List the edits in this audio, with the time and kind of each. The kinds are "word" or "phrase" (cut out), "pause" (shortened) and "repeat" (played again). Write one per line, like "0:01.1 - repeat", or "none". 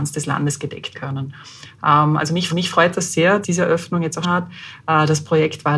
0:00.9 - word
0:02.5 - repeat
0:03.4 - word
0:04.2 - word